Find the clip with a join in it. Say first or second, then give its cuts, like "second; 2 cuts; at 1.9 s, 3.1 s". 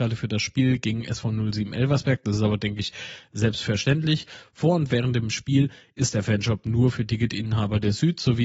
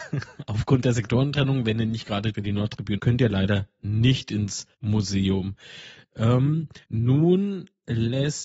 second; 4 cuts; at 2.3 s, 3.0 s, 4.7 s, 6.8 s